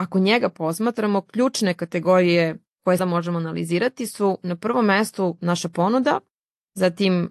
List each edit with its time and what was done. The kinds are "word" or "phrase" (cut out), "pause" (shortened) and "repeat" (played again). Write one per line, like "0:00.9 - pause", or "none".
0:03.0 - word